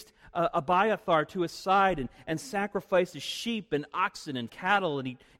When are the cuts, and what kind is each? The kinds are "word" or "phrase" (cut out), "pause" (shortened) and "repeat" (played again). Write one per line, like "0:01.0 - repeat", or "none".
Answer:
0:04.5 - word